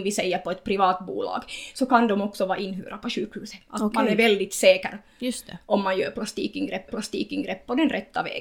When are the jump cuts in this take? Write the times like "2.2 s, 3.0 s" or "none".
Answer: 6.9 s